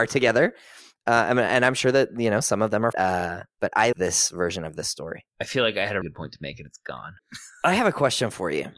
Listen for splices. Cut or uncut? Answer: cut